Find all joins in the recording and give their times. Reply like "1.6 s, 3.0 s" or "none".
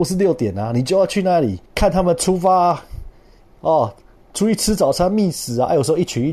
1.7 s